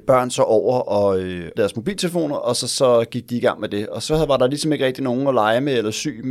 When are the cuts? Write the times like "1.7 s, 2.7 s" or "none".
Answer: 1.5 s